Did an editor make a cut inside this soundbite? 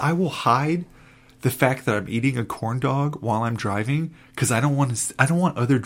no; 0 cuts

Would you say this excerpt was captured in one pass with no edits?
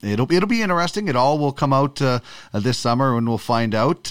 yes; 0 cuts

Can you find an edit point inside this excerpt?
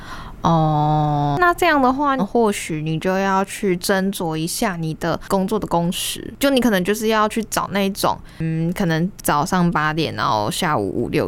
no; 0 cuts

